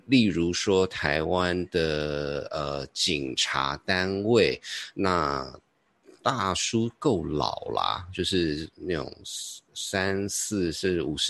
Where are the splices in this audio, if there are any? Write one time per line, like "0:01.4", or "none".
none